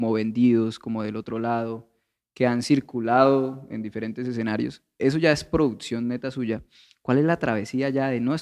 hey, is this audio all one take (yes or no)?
yes